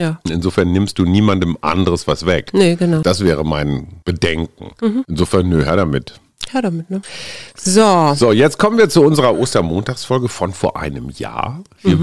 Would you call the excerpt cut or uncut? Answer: uncut